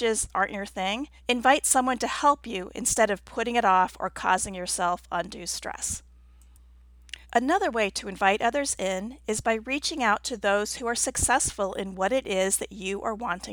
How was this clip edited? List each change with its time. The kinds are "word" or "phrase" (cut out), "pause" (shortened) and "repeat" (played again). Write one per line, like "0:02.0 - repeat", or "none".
0:01.2 - pause
0:07.2 - pause

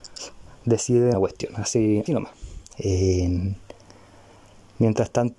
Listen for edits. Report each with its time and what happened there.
0:01.1 - phrase
0:02.1 - word

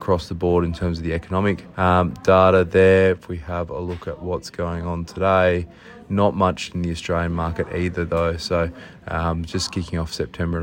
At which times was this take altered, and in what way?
0:01.7 - pause

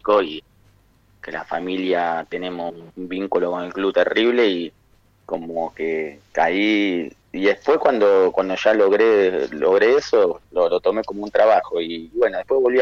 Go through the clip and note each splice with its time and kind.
0:02.9 - pause
0:07.2 - pause
0:10.4 - pause

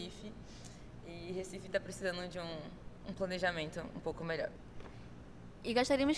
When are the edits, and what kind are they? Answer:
none

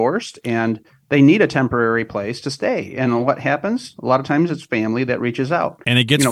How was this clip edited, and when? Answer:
none

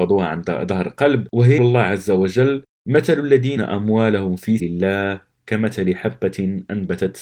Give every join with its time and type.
0:01.6 - word
0:03.6 - word
0:04.6 - word

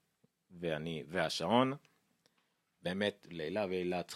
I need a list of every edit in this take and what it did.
none

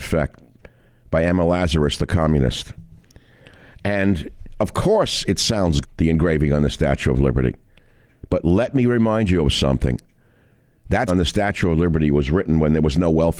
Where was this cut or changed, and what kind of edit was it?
0:05.8 - word
0:11.1 - word

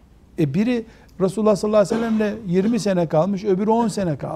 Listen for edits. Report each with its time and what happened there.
none

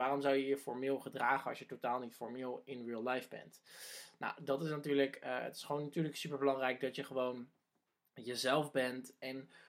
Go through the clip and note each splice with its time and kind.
none

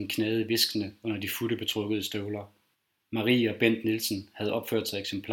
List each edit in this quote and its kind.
0:02.7 - pause

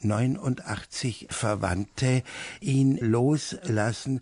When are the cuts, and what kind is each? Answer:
0:01.3 - word
0:03.0 - word

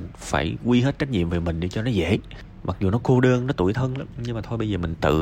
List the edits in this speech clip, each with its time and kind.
none

